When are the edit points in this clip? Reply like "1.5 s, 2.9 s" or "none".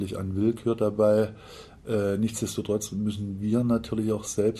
none